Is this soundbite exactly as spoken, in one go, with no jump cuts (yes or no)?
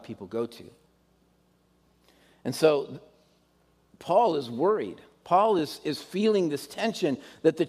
yes